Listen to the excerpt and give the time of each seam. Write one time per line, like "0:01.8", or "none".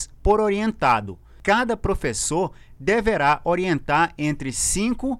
none